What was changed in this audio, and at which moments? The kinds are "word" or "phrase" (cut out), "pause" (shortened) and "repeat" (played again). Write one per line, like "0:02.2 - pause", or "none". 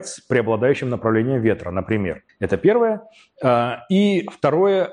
0:02.3 - pause

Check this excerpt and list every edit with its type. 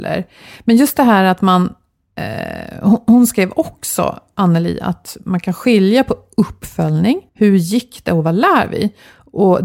0:07.3 - pause

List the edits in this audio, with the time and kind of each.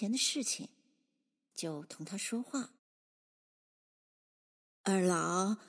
0:02.8 - pause

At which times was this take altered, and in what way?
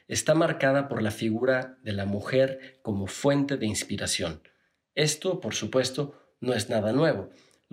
none

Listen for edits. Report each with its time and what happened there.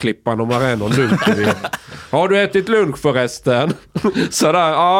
none

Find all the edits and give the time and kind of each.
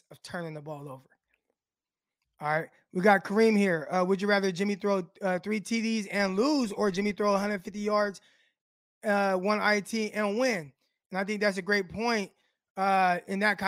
none

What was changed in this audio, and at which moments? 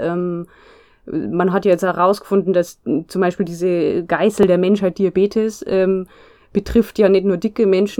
none

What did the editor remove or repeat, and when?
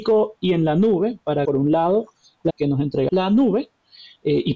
0:01.4 - word
0:02.5 - word
0:03.1 - word

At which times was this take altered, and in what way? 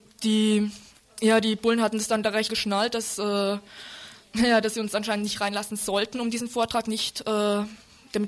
0:02.5 - word

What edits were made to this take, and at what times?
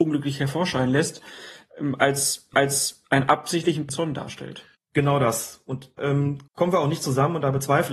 0:02.5 - repeat
0:03.9 - phrase
0:04.7 - pause
0:06.0 - word
0:06.5 - pause

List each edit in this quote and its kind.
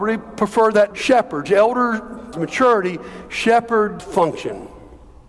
0:00.9 - word
0:02.3 - word
0:04.0 - word

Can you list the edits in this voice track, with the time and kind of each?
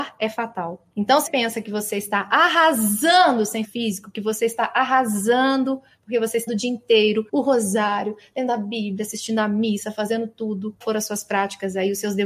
0:00.9 - pause
0:01.3 - word
0:03.6 - phrase
0:06.5 - word
0:07.3 - pause
0:10.8 - phrase

